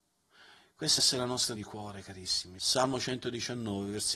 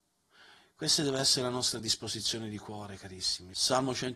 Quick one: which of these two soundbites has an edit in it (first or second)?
first